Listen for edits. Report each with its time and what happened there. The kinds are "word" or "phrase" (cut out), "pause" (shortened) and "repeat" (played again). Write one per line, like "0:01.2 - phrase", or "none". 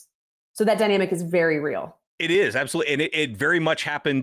0:02.1 - pause